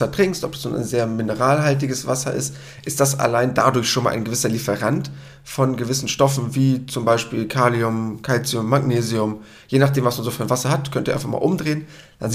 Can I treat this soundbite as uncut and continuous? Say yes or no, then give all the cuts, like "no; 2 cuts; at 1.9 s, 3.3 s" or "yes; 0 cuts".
yes; 0 cuts